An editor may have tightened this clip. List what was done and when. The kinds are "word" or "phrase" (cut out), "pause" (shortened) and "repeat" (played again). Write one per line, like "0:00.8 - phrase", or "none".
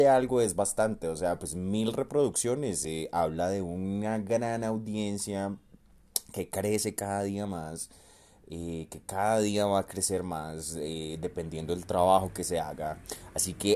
none